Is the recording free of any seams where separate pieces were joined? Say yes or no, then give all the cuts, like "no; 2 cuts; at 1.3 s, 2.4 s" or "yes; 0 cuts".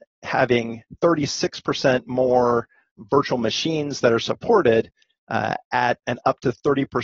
yes; 0 cuts